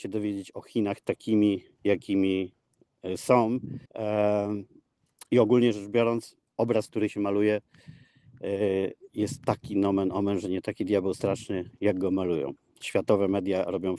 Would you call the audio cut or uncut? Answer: cut